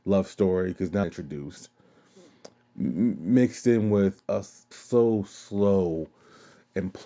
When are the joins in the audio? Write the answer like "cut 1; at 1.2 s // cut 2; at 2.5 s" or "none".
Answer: cut 1; at 1.0 s // cut 2; at 4.2 s // cut 3; at 4.7 s